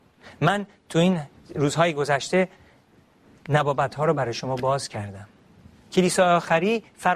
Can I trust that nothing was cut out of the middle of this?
yes; 0 cuts

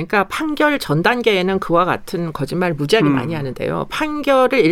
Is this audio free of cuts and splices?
yes; 0 cuts

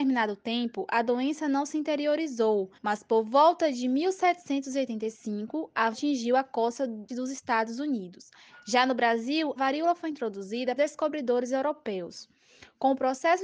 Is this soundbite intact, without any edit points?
no; 6 cuts; at 2.7 s, 5.9 s, 7.1 s, 8.5 s, 9.6 s, 10.8 s

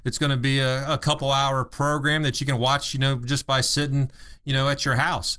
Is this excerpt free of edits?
yes; 0 cuts

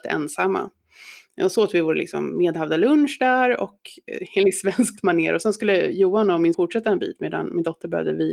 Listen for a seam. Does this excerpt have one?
yes; 1 cut; at 6.5 s

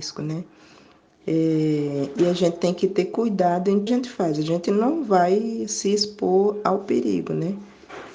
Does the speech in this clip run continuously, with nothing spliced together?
no; 1 cut; at 3.9 s

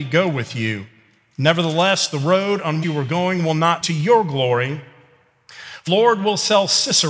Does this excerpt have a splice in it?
yes; 3 cuts; at 2.8 s, 3.8 s, 5.9 s

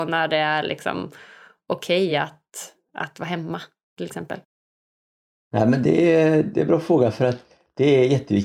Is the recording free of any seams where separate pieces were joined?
yes; 0 cuts

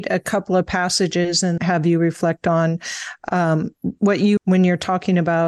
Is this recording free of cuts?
no; 2 cuts; at 1.6 s, 4.4 s

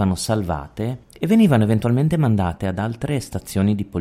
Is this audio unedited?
no; 1 cut; at 1.0 s

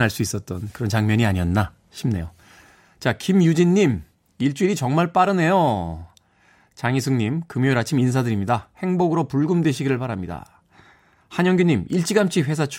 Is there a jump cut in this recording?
no; 0 cuts

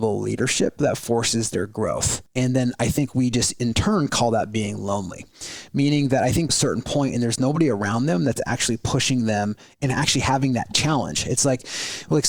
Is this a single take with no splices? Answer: no; 2 cuts; at 2.3 s, 6.5 s

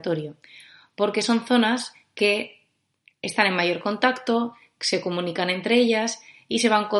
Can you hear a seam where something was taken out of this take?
no; 0 cuts

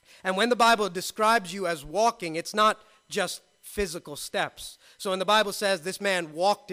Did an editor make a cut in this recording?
no; 0 cuts

